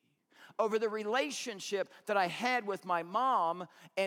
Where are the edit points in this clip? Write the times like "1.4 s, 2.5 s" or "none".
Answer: none